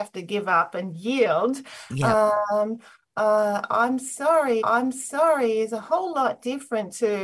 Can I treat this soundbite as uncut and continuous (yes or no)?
no